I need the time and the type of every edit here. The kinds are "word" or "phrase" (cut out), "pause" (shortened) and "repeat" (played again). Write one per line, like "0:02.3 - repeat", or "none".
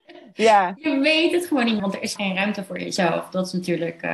0:01.8 - word
0:02.2 - word

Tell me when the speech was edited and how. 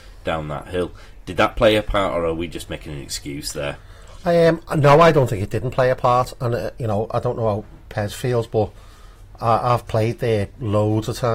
none

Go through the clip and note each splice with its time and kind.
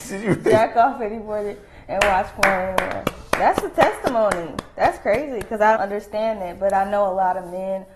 0:05.8 - word

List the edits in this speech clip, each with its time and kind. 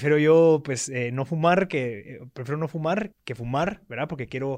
0:03.1 - word

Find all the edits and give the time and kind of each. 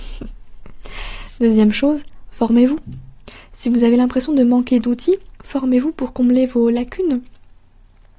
0:05.3 - pause

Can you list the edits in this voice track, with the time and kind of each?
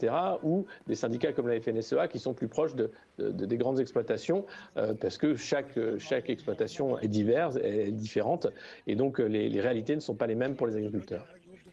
0:07.0 - word

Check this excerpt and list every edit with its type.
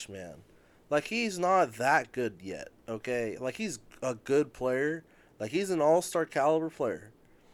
none

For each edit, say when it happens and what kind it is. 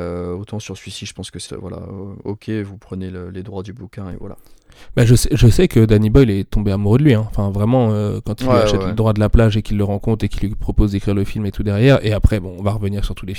0:01.5 - word

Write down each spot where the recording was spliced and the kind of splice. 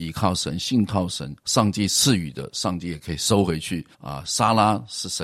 0:01.4 - pause
0:03.9 - pause

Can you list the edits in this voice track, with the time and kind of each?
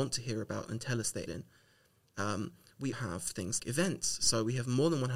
0:01.3 - word
0:02.9 - word
0:03.6 - word

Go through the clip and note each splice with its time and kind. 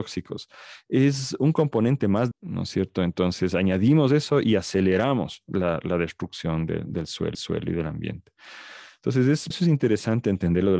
0:02.3 - phrase
0:07.3 - repeat
0:09.5 - word

